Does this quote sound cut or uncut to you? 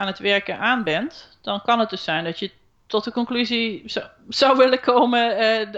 uncut